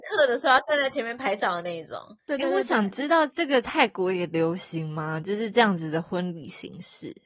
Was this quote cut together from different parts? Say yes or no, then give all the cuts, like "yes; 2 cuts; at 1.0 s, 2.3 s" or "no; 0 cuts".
yes; 1 cut; at 2.2 s